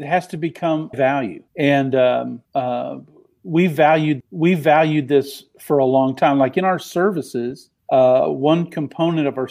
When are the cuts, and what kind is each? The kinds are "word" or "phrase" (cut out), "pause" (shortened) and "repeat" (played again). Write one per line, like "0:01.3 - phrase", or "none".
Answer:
0:00.9 - phrase
0:01.5 - pause
0:02.4 - pause
0:04.2 - repeat
0:07.8 - pause